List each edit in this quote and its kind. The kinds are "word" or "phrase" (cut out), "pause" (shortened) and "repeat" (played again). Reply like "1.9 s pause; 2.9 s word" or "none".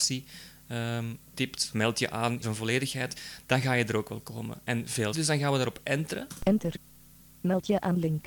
1.7 s word; 2.4 s word; 5.1 s word; 7.1 s pause

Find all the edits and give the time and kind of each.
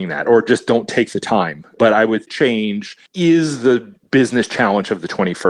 2.3 s phrase; 3.1 s pause

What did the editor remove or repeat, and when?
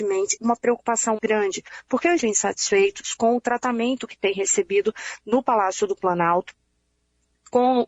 1.2 s word; 2.2 s phrase

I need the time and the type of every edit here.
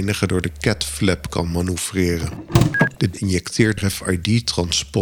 3.1 s word; 3.8 s phrase

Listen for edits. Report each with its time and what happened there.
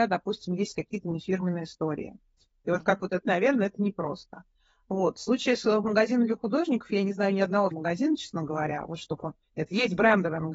3.2 s word; 7.7 s word

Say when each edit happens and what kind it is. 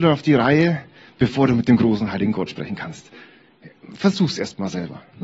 none

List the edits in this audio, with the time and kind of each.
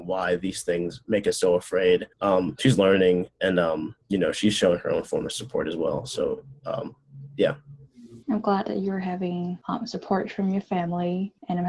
2.1 s pause; 3.3 s pause; 4.0 s pause; 8.2 s pause

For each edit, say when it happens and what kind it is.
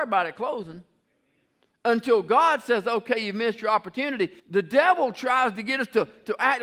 4.4 s pause

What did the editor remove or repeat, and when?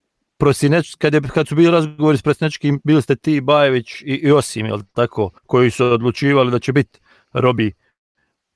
5.4 s pause

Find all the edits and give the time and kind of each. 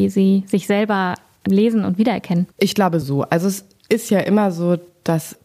2.5 s pause; 3.0 s word

